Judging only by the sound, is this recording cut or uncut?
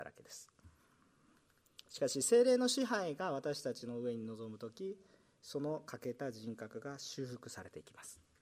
uncut